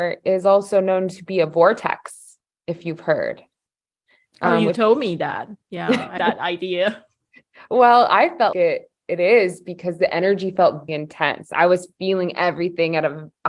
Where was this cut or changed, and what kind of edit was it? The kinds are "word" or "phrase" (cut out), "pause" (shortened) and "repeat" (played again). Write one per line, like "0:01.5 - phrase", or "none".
0:06.2 - word
0:08.5 - word
0:10.9 - word